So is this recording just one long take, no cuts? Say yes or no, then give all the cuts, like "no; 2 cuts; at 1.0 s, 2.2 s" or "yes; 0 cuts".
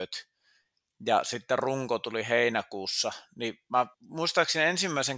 no; 1 cut; at 3.9 s